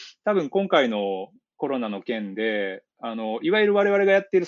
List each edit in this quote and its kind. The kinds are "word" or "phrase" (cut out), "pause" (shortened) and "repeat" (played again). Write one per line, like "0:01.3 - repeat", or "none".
none

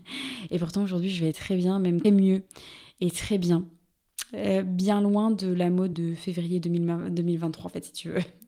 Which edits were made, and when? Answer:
0:01.3 - word
0:02.0 - word
0:05.9 - word

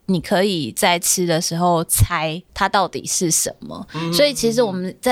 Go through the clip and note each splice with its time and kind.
0:02.5 - pause

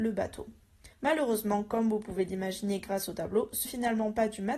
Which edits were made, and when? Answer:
0:00.9 - pause
0:03.6 - word

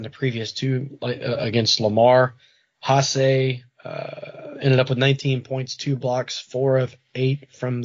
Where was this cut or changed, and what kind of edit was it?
none

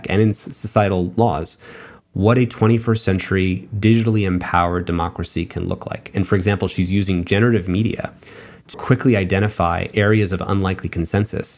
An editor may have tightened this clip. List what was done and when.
0:08.7 - word

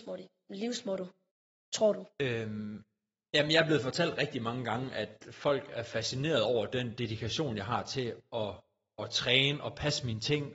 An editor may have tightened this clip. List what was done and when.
0:01.3 - pause
0:02.1 - pause

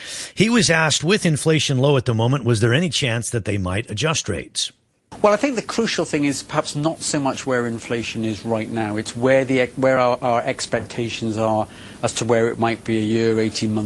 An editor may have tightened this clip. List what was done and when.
none

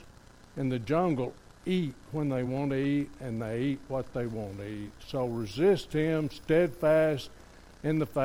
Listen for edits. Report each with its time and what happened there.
none

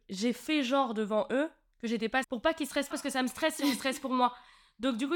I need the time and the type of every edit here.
0:02.2 - word
0:02.9 - word

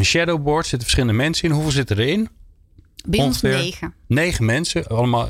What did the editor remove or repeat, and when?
none

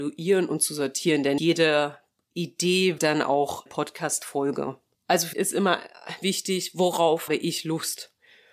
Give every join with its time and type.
0:01.4 - word
0:03.0 - word
0:03.7 - word
0:05.3 - word
0:06.2 - word
0:07.3 - word

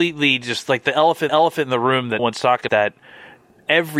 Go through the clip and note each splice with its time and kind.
0:01.3 - repeat
0:02.2 - word
0:02.7 - phrase

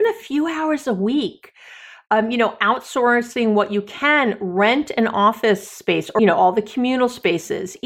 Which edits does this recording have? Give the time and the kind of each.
0:06.2 - word

